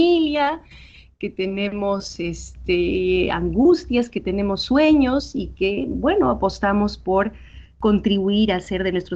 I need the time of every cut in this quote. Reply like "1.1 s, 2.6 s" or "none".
none